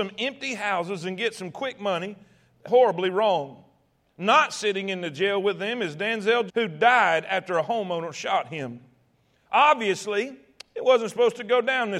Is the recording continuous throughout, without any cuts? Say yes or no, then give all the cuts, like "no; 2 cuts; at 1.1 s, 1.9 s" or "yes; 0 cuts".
no; 2 cuts; at 2.7 s, 6.5 s